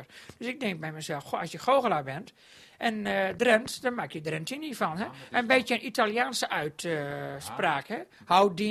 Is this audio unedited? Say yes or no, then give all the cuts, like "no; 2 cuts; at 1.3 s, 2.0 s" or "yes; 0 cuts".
yes; 0 cuts